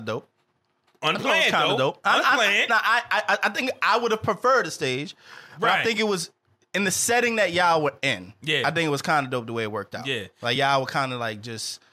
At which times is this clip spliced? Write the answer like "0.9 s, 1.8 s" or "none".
none